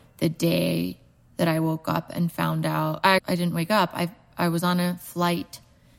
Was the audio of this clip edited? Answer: yes; 1 cut; at 3.2 s

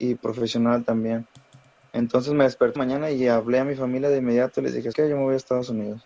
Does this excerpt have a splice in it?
yes; 2 cuts; at 2.8 s, 4.9 s

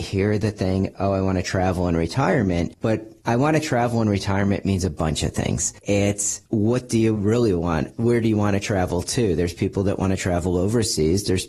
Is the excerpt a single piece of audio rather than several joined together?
yes; 0 cuts

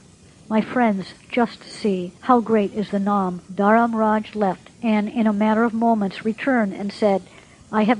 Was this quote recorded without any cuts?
no; 3 cuts; at 2.2 s, 3.4 s, 4.7 s

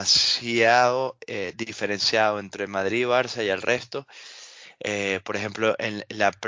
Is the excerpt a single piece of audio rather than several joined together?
yes; 0 cuts

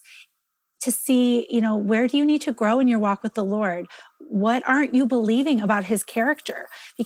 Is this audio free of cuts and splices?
yes; 0 cuts

